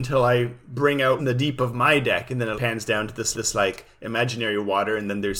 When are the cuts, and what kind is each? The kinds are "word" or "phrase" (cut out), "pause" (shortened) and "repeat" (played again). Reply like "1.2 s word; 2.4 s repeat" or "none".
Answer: 1.2 s phrase; 2.5 s word; 3.3 s repeat